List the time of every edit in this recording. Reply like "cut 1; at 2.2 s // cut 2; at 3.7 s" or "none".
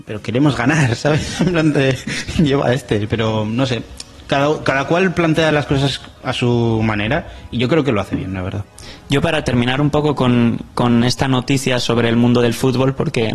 none